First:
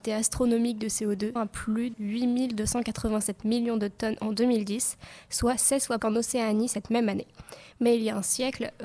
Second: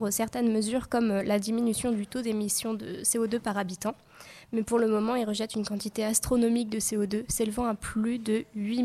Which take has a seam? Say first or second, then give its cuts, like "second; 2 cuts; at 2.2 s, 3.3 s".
first; 3 cuts; at 1.4 s, 1.9 s, 6.0 s